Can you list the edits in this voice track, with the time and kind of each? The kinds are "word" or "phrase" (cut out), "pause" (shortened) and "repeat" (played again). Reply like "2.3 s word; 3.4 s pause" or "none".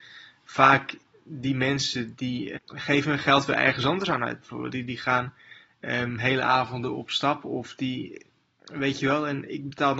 2.6 s word